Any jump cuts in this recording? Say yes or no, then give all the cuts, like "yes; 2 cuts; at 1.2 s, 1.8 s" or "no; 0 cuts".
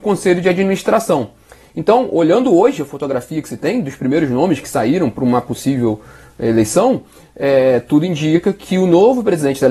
no; 0 cuts